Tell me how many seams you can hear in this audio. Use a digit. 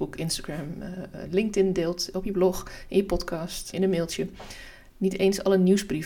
1